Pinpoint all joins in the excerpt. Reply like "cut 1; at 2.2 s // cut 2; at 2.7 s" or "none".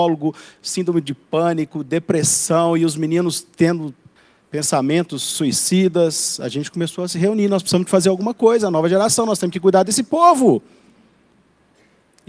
cut 1; at 4.2 s